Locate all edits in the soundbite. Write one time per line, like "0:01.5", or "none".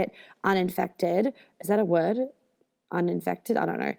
none